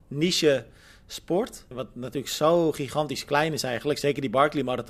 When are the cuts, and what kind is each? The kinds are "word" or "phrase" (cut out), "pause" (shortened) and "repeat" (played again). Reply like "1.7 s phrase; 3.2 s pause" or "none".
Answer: 1.7 s word